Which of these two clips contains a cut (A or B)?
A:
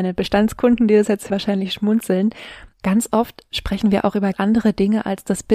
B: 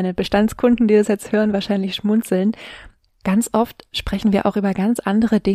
A